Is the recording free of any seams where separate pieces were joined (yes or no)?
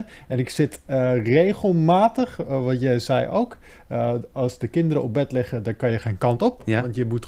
yes